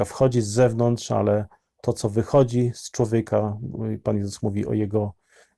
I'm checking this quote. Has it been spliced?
no; 0 cuts

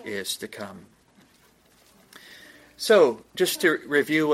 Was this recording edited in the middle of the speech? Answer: no; 0 cuts

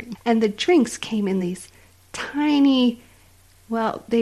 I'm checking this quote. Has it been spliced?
no; 0 cuts

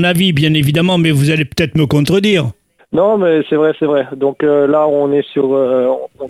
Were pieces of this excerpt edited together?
yes; 1 cut; at 2.8 s

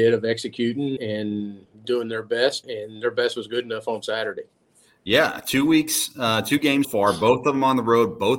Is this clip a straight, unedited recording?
no; 3 cuts; at 1.0 s, 2.6 s, 6.8 s

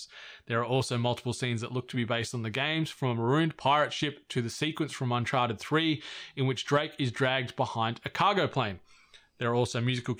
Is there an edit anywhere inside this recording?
no; 0 cuts

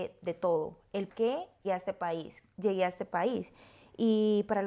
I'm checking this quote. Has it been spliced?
yes; 3 cuts; at 1.1 s, 1.6 s, 2.5 s

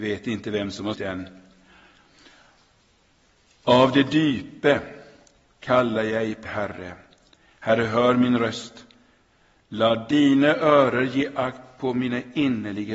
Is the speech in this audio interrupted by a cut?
yes; 2 cuts; at 0.9 s, 6.4 s

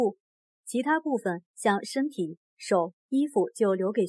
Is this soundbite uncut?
no; 1 cut; at 3.0 s

